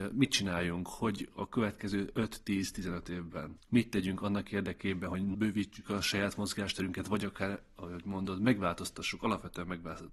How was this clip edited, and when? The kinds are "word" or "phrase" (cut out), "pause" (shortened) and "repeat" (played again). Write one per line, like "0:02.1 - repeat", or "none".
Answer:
none